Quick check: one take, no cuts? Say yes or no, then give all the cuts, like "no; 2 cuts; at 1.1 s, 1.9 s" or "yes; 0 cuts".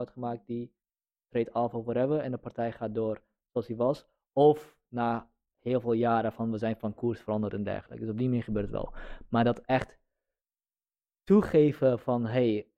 yes; 0 cuts